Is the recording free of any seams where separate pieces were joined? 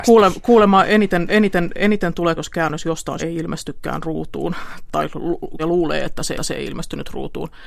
no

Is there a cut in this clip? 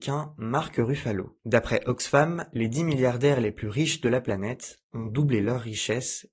no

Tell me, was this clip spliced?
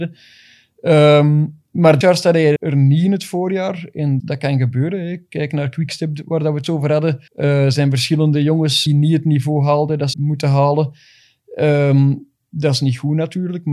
yes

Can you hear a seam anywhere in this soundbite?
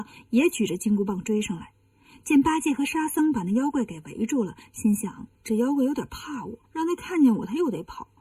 yes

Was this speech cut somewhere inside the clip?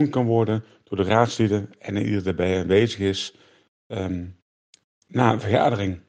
no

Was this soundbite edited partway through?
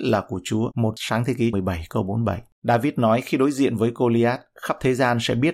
yes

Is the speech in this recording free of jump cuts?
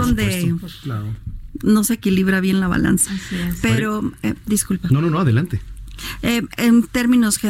yes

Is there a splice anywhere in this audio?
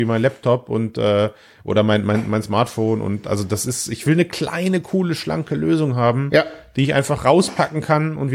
no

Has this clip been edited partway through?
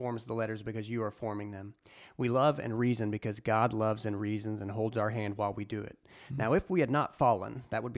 no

